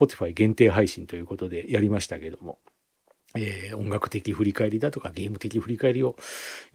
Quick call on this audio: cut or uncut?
uncut